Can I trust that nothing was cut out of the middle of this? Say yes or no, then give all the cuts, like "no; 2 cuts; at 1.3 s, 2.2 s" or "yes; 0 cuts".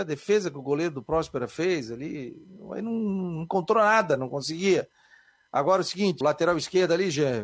no; 1 cut; at 6.2 s